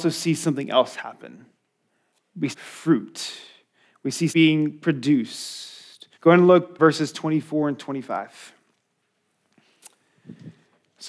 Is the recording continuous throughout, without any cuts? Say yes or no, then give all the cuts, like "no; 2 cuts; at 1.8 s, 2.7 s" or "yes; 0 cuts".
no; 4 cuts; at 2.5 s, 4.3 s, 6.1 s, 6.8 s